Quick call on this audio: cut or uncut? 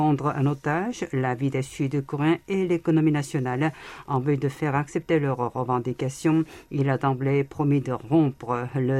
uncut